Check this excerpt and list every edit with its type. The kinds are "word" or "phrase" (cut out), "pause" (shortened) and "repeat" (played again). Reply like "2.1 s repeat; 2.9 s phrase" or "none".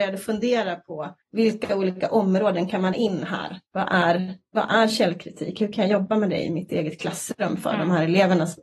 1.2 s pause; 2.9 s word; 3.7 s pause